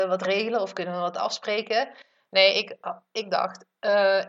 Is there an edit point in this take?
no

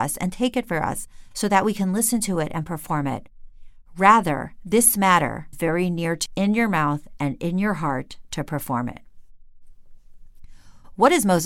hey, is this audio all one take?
no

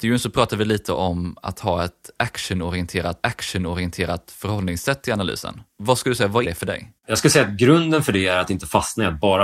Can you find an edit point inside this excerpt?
yes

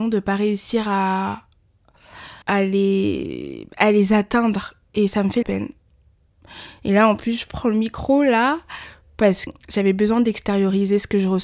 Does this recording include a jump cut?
yes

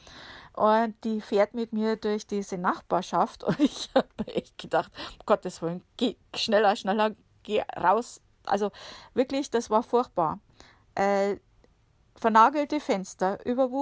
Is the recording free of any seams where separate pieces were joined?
yes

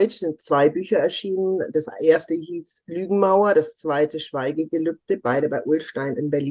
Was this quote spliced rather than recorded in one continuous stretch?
no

